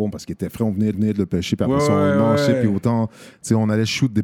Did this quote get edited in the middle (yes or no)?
yes